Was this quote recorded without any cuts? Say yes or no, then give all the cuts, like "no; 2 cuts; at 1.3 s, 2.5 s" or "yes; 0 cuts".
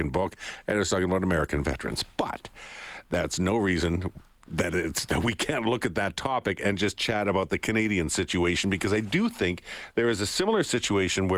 yes; 0 cuts